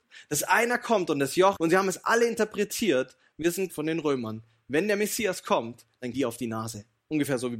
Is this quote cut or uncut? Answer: cut